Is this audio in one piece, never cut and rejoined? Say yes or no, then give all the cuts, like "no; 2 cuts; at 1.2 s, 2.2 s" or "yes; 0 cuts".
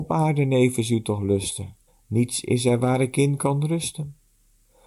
no; 1 cut; at 1.9 s